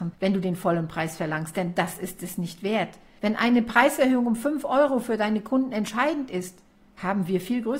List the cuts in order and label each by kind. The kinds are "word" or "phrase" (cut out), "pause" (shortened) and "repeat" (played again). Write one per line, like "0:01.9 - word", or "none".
none